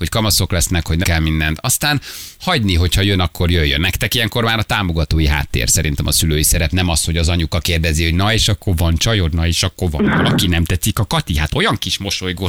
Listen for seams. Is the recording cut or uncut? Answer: cut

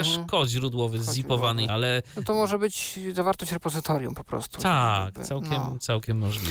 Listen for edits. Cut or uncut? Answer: cut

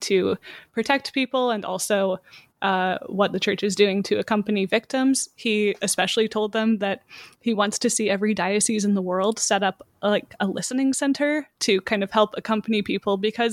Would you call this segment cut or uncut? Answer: uncut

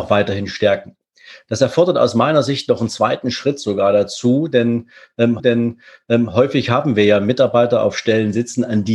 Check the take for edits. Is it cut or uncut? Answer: cut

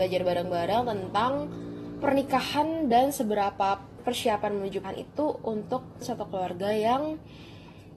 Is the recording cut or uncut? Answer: cut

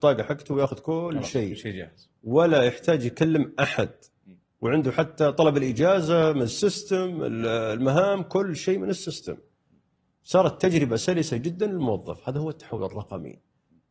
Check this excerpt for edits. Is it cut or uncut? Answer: uncut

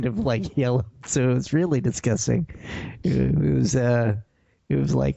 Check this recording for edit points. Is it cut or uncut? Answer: uncut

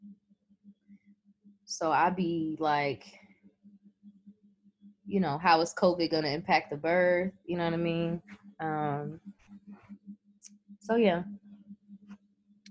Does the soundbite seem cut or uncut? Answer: uncut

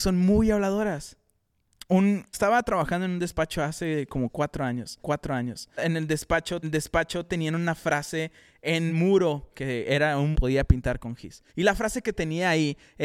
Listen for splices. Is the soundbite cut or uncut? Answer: cut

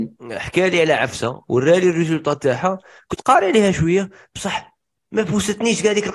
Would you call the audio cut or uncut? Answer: uncut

